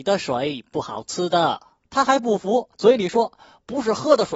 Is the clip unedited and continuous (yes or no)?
no